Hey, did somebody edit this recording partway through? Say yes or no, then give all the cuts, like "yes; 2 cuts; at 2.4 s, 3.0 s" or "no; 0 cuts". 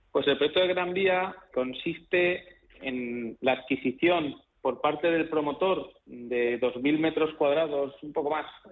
yes; 3 cuts; at 1.5 s, 4.5 s, 6.0 s